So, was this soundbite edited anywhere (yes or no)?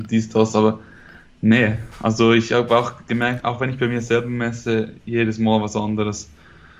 yes